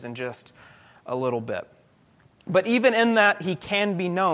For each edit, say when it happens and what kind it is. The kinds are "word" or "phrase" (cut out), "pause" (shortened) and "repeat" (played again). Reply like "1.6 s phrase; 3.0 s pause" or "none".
none